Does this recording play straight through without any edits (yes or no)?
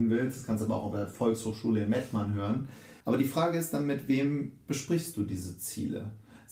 no